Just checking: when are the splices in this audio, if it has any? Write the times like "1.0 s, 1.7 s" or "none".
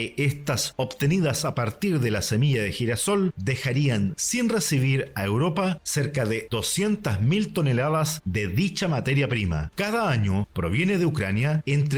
none